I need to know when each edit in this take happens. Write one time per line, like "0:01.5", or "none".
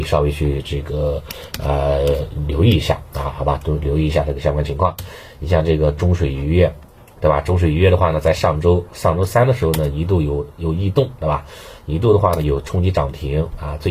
0:06.9
0:08.9